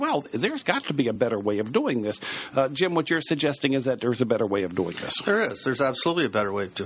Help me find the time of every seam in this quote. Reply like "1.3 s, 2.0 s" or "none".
none